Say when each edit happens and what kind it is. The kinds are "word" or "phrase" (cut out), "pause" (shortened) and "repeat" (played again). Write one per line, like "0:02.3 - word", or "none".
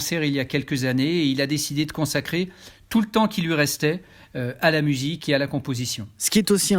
none